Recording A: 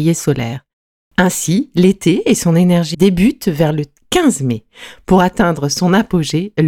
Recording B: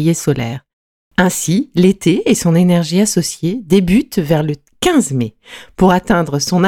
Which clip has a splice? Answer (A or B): A